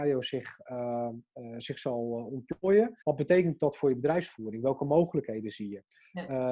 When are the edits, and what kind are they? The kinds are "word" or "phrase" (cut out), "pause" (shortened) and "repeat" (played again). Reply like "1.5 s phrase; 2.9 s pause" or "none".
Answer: 3.0 s pause